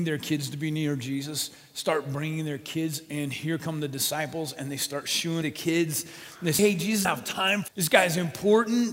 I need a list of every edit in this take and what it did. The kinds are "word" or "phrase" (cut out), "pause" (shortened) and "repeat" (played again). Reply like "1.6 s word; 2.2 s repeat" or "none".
5.4 s word; 6.6 s word; 7.0 s word; 7.7 s word

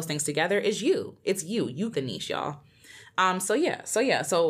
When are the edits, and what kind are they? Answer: 1.9 s word

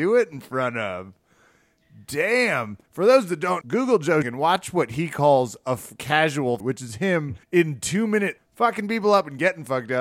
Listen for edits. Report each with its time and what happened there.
2.9 s pause; 3.6 s word; 4.2 s word; 6.6 s word; 7.4 s pause; 8.4 s word

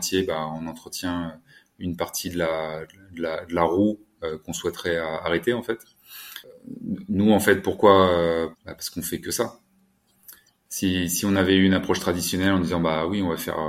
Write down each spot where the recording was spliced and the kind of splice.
8.5 s phrase

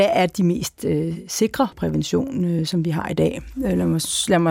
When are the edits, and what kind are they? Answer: 1.7 s phrase

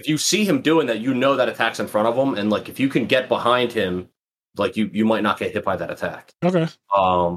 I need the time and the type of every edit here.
none

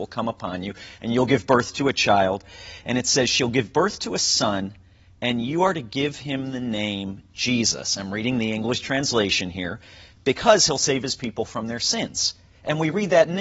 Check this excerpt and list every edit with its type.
none

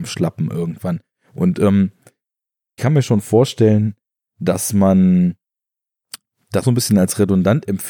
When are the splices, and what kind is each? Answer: 2.8 s word; 6.6 s word

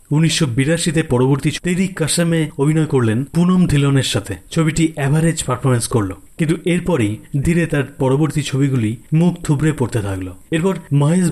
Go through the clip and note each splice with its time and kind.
1.6 s word; 7.4 s word

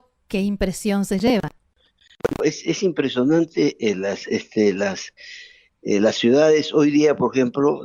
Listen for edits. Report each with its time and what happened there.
none

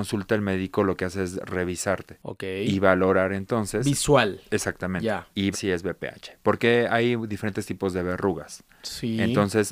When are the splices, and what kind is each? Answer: 5.5 s word

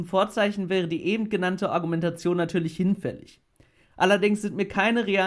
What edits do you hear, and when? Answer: none

